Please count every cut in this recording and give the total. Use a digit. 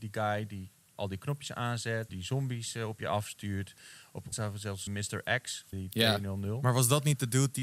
4